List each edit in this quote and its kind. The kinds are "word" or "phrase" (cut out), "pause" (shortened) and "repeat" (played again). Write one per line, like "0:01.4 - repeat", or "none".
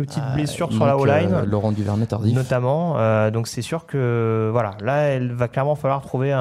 none